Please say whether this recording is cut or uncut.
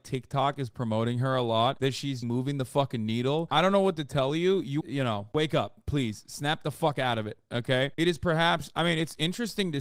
cut